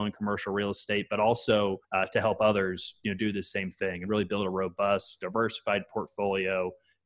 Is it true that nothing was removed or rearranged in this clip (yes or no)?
no